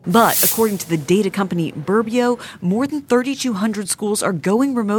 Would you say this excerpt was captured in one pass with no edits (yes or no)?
yes